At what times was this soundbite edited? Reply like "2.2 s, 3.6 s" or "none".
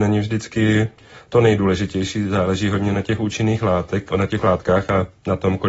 4.1 s, 4.4 s